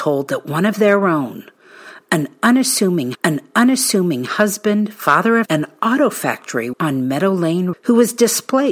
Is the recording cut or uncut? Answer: cut